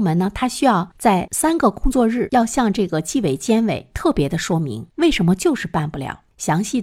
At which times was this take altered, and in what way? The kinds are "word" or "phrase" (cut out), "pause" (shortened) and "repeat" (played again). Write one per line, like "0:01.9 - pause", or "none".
none